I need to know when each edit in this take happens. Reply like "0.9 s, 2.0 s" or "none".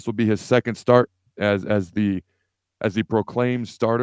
none